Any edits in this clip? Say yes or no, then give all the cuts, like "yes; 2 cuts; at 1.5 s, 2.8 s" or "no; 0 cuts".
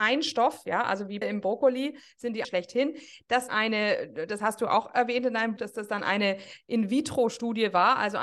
yes; 4 cuts; at 1.2 s, 2.4 s, 3.5 s, 5.6 s